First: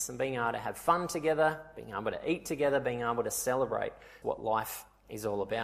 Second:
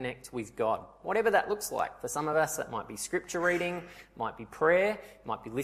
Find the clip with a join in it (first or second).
first